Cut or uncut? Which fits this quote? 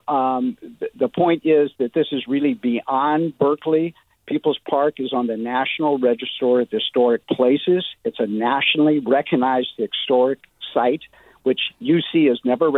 uncut